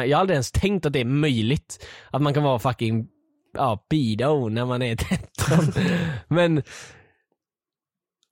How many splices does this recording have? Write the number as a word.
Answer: zero